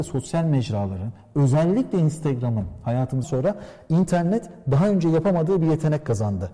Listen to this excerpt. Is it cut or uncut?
cut